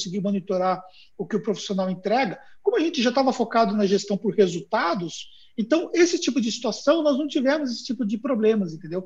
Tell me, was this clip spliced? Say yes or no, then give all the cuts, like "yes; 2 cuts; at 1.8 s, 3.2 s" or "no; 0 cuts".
no; 0 cuts